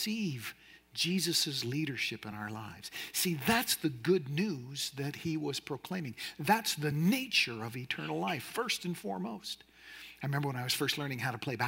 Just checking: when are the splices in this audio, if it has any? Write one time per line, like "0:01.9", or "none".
none